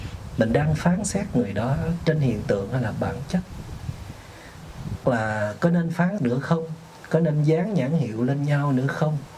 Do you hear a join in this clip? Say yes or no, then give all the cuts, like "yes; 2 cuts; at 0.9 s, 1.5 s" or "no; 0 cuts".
yes; 2 cuts; at 5.0 s, 6.2 s